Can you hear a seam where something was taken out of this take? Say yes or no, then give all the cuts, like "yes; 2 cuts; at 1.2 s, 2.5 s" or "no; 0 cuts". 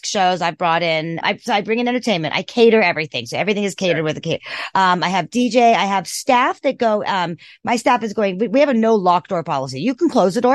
yes; 1 cut; at 1.2 s